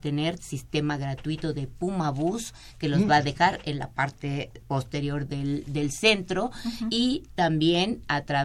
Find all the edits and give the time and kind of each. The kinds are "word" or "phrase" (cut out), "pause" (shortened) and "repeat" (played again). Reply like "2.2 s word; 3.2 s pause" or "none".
4.6 s pause